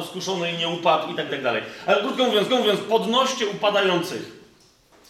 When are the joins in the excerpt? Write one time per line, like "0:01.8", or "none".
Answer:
0:01.3
0:02.5